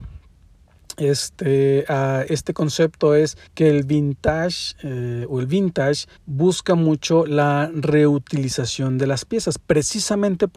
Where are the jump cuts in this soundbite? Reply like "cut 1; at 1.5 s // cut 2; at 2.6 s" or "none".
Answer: cut 1; at 3.5 s // cut 2; at 6.2 s